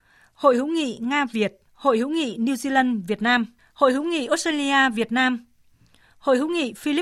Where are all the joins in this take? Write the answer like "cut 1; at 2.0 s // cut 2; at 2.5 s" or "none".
cut 1; at 1.7 s // cut 2; at 3.6 s